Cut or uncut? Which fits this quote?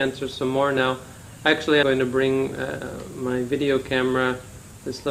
cut